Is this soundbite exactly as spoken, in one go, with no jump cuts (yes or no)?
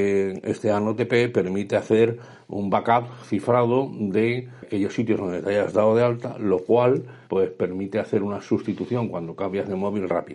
no